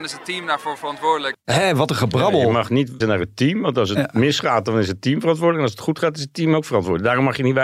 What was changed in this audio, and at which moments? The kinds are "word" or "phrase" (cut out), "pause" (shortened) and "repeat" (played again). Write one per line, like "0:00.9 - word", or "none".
0:03.0 - word